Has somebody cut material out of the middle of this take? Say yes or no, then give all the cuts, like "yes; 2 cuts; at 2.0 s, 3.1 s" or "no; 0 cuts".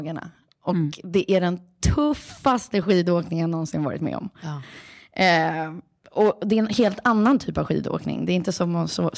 no; 0 cuts